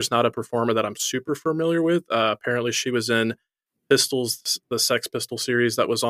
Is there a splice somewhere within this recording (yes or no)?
no